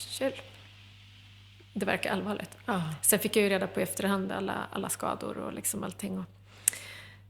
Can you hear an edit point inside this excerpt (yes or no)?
no